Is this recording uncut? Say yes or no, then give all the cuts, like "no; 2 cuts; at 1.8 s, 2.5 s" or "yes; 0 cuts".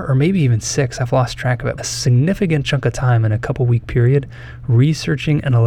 no; 1 cut; at 1.8 s